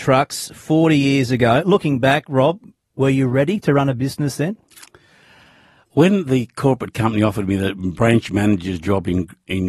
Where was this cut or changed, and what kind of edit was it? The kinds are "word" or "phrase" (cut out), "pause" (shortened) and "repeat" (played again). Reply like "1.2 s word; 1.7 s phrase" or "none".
none